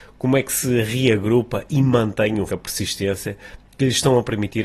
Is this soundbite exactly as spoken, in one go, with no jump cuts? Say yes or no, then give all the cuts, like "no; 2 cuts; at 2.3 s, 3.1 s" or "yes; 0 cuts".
no; 1 cut; at 2.5 s